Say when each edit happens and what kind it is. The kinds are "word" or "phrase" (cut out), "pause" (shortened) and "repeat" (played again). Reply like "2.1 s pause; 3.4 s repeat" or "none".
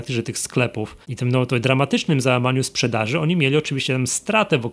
1.0 s pause